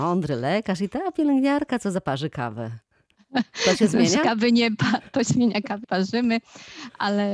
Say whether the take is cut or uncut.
cut